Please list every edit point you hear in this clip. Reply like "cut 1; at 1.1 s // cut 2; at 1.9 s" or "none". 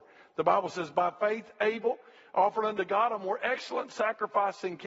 none